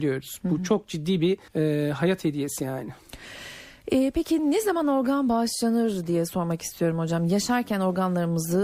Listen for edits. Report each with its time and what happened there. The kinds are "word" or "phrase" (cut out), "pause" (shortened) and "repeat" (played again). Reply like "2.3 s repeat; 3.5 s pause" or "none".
1.5 s pause